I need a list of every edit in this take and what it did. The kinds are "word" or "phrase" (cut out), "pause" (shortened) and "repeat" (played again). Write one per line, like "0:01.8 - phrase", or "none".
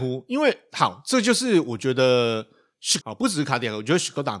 0:03.0 - word